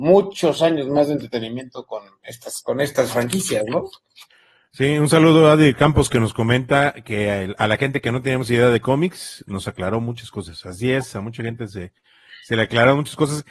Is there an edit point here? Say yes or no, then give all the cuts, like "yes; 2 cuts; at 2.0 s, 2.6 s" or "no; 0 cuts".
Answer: no; 0 cuts